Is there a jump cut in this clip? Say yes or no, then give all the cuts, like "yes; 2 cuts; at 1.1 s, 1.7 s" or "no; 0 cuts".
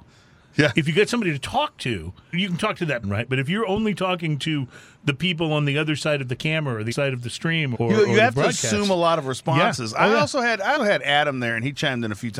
yes; 5 cuts; at 2.3 s, 3.0 s, 6.9 s, 7.7 s, 10.8 s